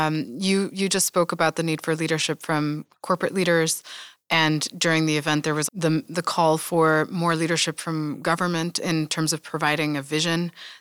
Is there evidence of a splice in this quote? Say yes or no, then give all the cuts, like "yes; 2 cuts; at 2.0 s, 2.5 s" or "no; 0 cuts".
yes; 1 cut; at 5.7 s